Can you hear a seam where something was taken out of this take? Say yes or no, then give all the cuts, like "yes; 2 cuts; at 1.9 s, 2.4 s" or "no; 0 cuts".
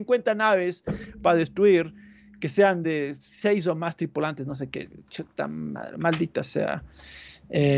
no; 0 cuts